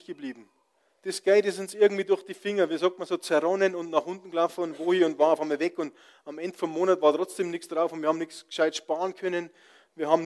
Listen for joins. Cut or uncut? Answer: uncut